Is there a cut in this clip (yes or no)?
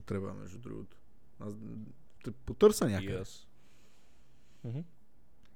yes